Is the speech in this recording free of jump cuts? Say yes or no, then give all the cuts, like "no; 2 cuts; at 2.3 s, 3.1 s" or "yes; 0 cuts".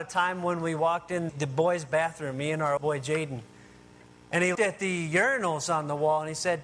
no; 3 cuts; at 1.3 s, 2.8 s, 4.5 s